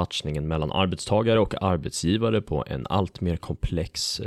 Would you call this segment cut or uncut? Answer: uncut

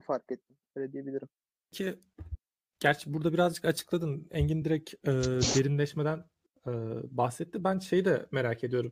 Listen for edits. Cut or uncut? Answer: uncut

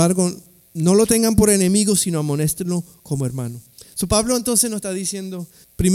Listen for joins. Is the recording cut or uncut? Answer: uncut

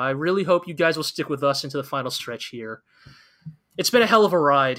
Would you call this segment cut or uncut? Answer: uncut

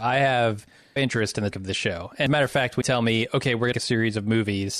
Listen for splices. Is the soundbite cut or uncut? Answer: cut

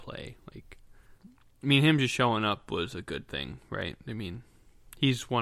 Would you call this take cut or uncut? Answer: cut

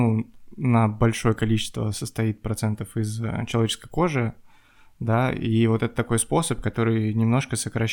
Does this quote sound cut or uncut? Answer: uncut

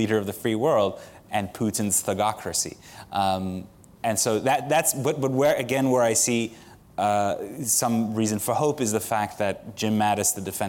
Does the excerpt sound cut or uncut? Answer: uncut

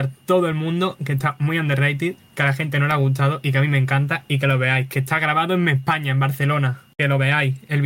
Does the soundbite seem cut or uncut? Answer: cut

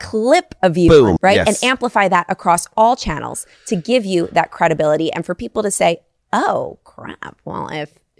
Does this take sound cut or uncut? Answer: cut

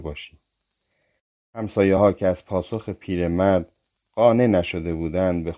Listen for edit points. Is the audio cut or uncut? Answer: uncut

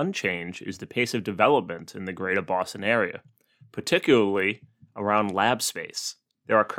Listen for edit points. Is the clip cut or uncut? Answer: uncut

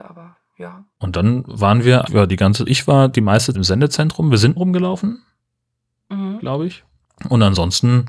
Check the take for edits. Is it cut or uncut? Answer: cut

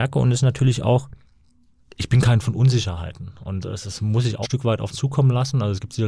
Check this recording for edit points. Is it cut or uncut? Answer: cut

